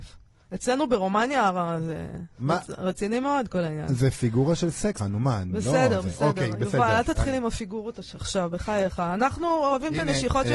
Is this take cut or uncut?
cut